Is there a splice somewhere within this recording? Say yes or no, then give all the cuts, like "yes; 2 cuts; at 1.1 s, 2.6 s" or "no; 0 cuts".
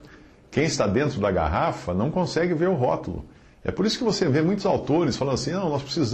no; 0 cuts